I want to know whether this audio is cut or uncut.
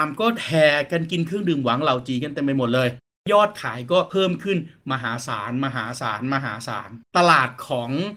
uncut